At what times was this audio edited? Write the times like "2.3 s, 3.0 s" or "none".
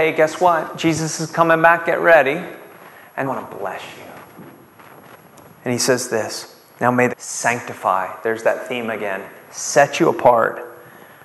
3.2 s, 7.1 s